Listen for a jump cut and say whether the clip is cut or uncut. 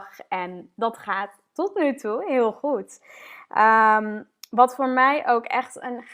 uncut